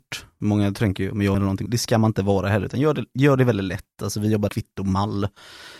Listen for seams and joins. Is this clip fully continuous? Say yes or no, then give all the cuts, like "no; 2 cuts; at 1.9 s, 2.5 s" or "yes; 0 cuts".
no; 3 cuts; at 1.3 s, 1.7 s, 4.5 s